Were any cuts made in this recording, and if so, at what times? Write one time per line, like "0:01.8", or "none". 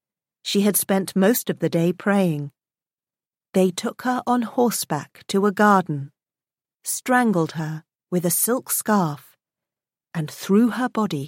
none

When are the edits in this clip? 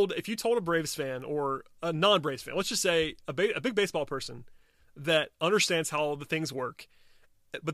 none

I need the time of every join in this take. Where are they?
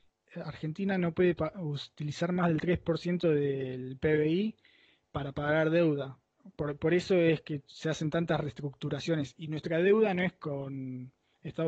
none

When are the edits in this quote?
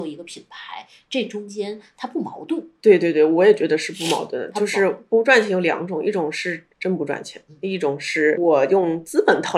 0:06.7

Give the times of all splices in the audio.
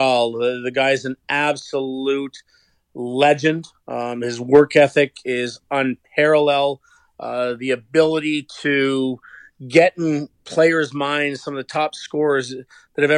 none

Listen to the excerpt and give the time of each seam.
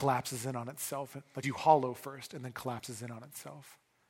0:01.4

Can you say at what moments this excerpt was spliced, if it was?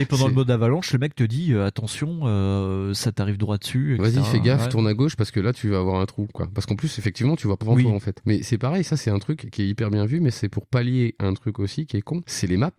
0:07.6

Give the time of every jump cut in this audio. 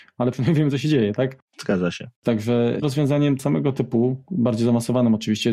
0:02.8
0:03.4

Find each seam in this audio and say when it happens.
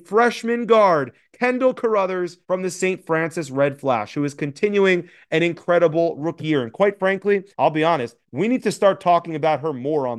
0:02.4
0:07.5
0:08.2

